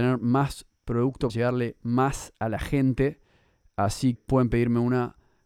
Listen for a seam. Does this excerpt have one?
yes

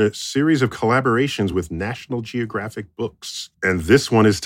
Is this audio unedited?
yes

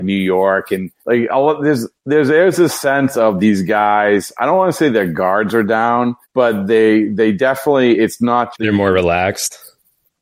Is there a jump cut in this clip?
yes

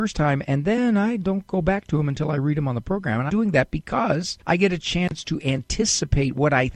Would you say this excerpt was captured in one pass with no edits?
no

